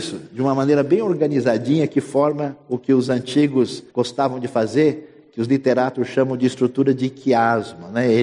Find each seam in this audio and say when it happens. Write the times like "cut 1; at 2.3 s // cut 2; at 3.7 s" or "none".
cut 1; at 3.9 s